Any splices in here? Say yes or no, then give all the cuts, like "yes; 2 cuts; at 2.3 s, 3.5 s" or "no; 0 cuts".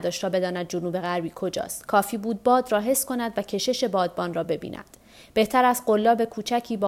no; 0 cuts